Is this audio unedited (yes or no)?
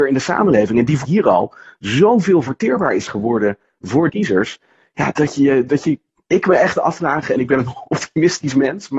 no